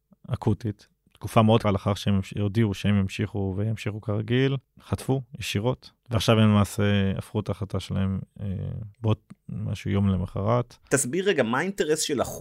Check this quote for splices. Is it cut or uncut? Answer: cut